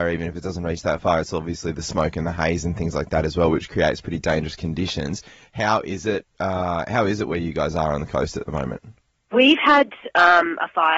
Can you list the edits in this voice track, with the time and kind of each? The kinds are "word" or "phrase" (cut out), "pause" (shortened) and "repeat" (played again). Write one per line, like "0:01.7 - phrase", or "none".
none